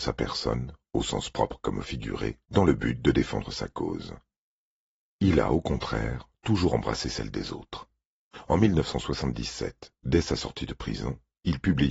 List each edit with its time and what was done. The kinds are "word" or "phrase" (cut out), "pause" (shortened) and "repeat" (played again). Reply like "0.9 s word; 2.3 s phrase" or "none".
2.4 s pause